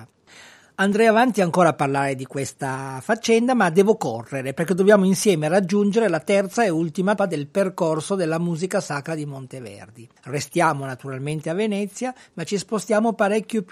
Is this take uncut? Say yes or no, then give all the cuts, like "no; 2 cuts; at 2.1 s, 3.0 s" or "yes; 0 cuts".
no; 2 cuts; at 7.2 s, 10.2 s